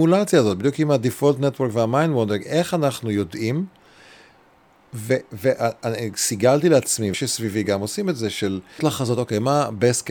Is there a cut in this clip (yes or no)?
yes